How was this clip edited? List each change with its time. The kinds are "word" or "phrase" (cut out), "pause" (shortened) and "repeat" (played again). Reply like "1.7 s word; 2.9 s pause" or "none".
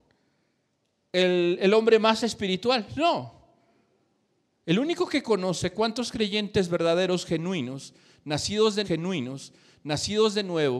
8.8 s repeat